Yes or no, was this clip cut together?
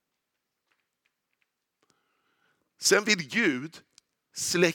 no